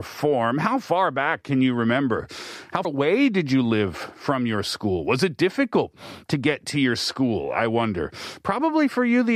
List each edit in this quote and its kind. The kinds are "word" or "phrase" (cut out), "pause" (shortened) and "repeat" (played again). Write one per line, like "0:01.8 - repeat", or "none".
0:02.8 - word